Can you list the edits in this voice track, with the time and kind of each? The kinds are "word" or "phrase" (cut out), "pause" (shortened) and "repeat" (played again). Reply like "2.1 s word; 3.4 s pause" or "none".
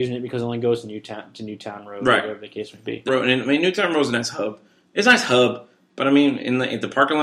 3.1 s word